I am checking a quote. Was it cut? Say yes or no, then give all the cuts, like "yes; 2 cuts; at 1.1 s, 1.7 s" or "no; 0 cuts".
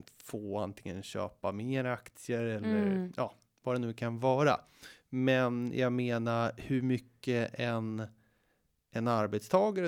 no; 0 cuts